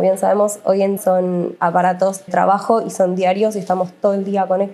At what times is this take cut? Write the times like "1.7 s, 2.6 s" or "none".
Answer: 1.0 s, 2.3 s